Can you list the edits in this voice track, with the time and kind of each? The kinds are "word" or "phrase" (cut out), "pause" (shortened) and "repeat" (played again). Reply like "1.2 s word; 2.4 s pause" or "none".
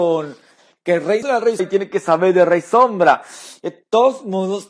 1.2 s phrase; 1.6 s word